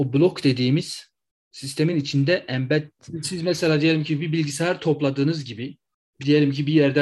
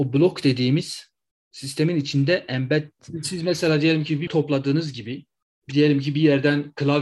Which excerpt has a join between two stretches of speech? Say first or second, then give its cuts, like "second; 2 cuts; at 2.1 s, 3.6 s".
second; 1 cut; at 4.3 s